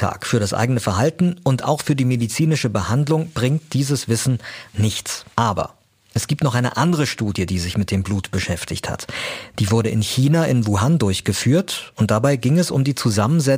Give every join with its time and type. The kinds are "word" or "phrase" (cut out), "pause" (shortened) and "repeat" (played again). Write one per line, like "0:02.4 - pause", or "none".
0:04.7 - word
0:05.3 - pause